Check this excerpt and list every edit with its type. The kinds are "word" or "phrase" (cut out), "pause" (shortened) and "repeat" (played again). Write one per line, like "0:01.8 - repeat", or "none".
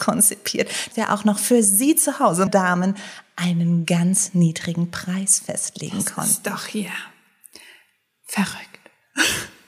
0:00.9 - word
0:02.5 - word